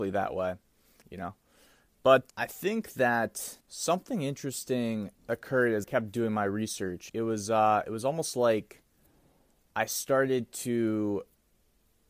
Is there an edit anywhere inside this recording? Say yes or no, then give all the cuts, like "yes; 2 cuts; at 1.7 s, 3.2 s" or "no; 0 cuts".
yes; 6 cuts; at 1.0 s, 2.3 s, 3.6 s, 5.2 s, 5.8 s, 7.1 s